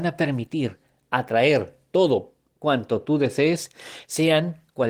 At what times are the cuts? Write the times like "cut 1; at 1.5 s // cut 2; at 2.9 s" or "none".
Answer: none